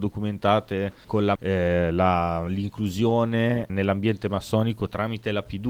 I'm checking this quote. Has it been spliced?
yes; 3 cuts; at 1.0 s, 1.4 s, 3.7 s

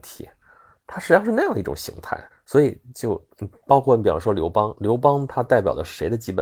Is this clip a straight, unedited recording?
no; 1 cut; at 2.3 s

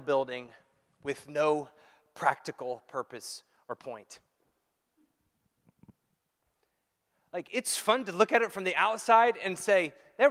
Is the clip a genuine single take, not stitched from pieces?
yes; 0 cuts

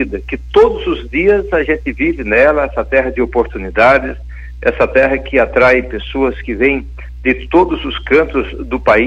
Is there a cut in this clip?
no; 0 cuts

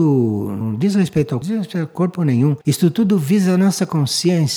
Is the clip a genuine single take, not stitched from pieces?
no; 2 cuts; at 1.4 s, 2.6 s

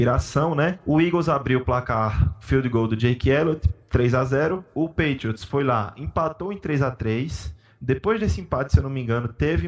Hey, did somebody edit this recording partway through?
yes; 1 cut; at 3.8 s

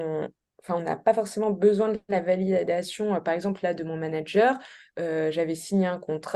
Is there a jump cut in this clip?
no; 0 cuts

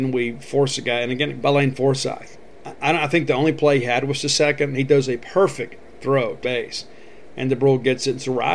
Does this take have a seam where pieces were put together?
yes; 3 cuts; at 1.4 s, 5.2 s, 6.4 s

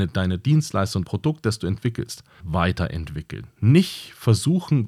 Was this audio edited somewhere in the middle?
yes; 2 cuts; at 1.0 s, 2.4 s

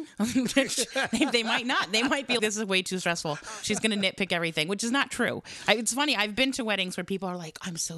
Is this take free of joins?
no; 1 cut; at 2.4 s

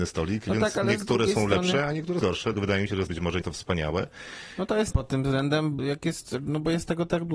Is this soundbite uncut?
no; 6 cuts; at 2.2 s, 2.5 s, 3.1 s, 3.4 s, 4.9 s, 5.8 s

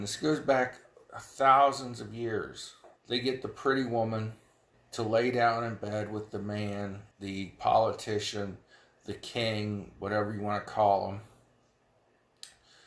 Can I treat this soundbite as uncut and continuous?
no; 3 cuts; at 3.0 s, 4.7 s, 7.1 s

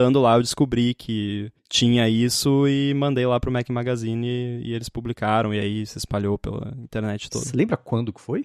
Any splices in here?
yes; 1 cut; at 1.6 s

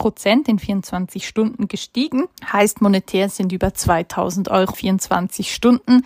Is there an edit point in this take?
yes; 2 cuts; at 2.4 s, 4.7 s

